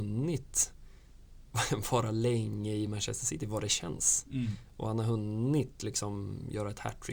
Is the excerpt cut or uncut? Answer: uncut